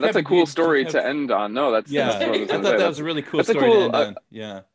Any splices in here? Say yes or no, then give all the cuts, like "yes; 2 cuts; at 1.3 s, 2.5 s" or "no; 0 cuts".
no; 0 cuts